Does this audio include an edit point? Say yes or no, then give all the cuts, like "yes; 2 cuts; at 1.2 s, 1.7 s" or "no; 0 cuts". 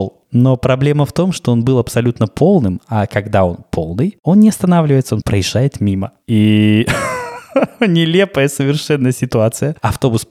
yes; 1 cut; at 5.2 s